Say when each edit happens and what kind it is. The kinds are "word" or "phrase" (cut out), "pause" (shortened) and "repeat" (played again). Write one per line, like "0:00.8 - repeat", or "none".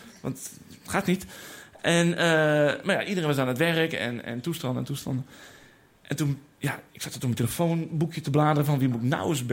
none